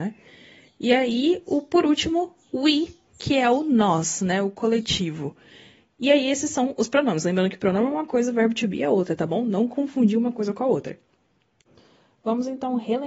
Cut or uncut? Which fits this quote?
uncut